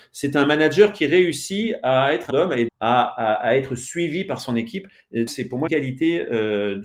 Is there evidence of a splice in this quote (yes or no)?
yes